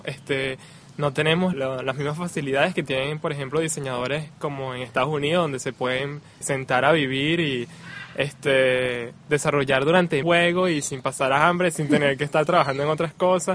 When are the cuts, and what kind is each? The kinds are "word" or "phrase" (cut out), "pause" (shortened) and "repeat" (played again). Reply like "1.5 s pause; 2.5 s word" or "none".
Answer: 1.5 s word; 6.4 s word; 10.2 s phrase